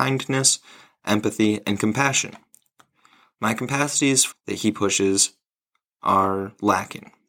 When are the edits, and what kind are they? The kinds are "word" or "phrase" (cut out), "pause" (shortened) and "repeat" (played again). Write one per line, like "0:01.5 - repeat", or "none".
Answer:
0:04.3 - phrase